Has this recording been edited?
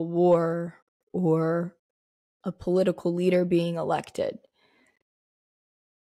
no; 0 cuts

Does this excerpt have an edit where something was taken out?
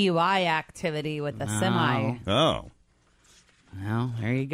no; 0 cuts

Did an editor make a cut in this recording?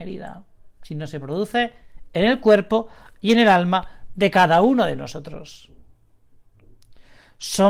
no; 0 cuts

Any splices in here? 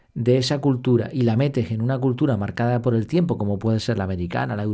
no; 0 cuts

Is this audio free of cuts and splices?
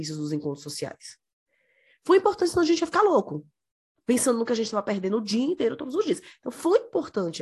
yes; 0 cuts

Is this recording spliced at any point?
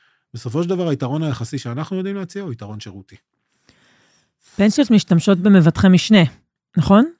no; 0 cuts

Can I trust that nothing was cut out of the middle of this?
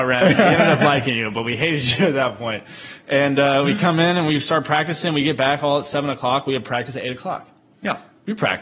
yes; 0 cuts

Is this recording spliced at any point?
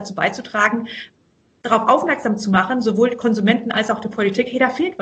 no; 0 cuts

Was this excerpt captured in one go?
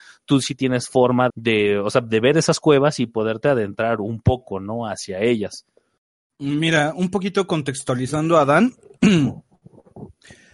no; 1 cut; at 1.3 s

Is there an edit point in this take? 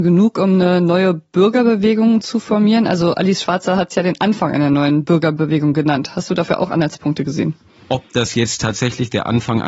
no; 0 cuts

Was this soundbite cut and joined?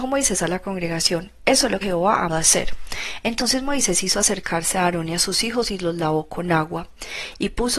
yes; 2 cuts; at 1.8 s, 2.3 s

